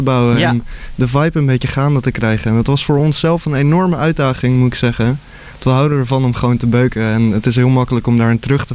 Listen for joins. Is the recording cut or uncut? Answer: uncut